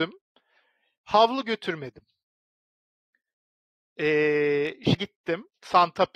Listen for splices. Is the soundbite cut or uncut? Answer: cut